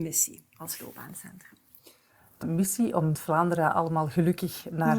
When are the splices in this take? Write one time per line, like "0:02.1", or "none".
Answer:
0:02.4
0:03.1